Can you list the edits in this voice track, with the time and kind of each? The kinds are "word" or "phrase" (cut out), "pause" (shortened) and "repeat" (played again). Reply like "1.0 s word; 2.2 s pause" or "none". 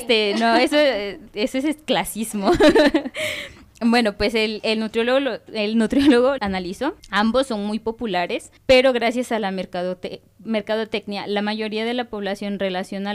6.4 s word; 7.0 s pause; 8.6 s pause